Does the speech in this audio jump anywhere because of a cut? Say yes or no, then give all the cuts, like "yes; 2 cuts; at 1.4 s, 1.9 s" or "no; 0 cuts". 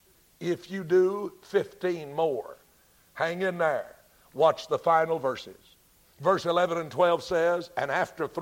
no; 0 cuts